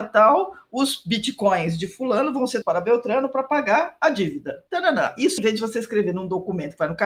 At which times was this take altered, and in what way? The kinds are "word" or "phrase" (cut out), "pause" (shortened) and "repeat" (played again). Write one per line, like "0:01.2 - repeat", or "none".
0:02.6 - word
0:04.7 - pause
0:05.4 - word